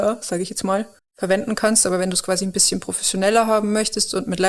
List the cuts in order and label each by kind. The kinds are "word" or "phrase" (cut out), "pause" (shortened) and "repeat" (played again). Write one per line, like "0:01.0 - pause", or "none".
0:01.0 - pause